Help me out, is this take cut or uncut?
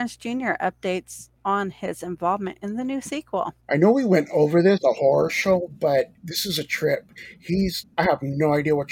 cut